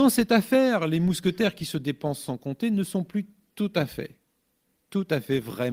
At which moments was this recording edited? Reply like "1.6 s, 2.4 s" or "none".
none